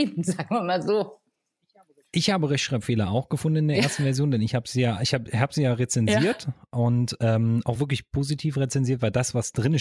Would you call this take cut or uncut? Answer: uncut